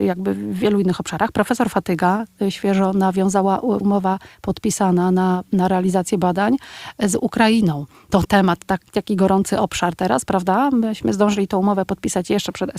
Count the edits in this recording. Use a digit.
2